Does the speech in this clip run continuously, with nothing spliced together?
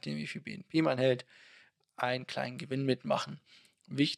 yes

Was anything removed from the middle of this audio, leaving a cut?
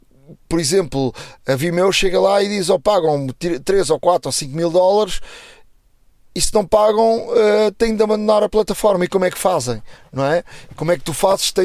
no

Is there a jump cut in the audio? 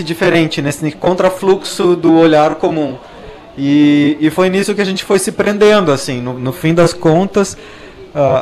no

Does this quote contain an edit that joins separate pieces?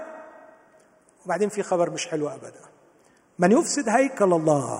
no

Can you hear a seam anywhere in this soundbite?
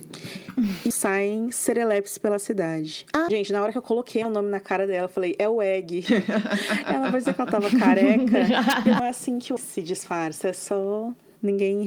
yes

